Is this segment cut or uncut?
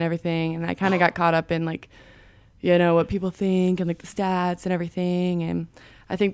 uncut